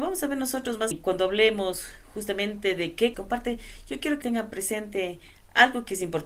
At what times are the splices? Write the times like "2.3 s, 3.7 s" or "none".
0.9 s, 3.1 s, 4.2 s